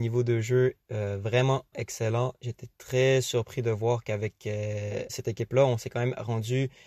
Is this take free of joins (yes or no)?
no